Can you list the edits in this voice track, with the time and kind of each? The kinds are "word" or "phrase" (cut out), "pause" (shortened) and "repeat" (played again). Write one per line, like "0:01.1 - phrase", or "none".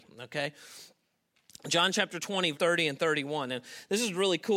0:02.5 - word